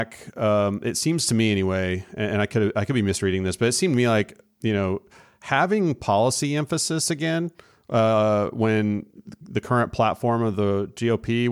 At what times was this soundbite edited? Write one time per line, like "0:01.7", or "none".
none